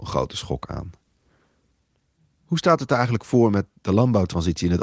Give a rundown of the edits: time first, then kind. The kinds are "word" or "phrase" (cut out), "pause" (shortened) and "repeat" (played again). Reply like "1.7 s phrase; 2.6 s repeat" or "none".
none